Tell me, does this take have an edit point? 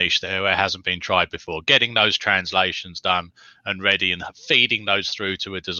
no; 0 cuts

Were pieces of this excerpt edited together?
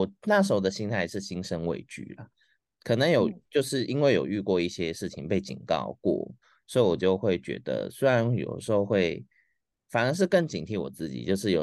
no; 0 cuts

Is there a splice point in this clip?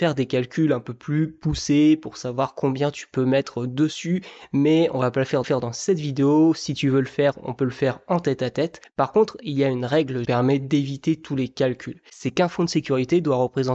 yes; 2 cuts; at 5.4 s, 10.2 s

